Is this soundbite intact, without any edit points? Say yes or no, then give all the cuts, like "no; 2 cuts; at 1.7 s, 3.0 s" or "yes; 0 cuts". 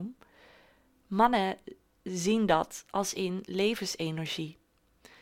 yes; 0 cuts